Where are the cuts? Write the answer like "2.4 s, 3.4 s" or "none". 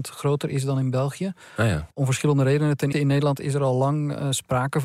2.9 s